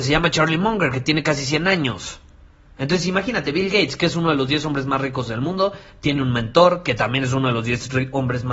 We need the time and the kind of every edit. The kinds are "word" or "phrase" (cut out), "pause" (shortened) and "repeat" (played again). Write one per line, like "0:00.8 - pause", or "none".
none